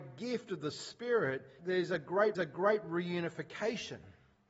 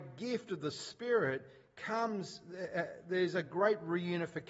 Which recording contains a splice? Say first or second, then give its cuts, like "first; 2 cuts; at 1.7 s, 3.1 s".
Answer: first; 2 cuts; at 1.6 s, 2.3 s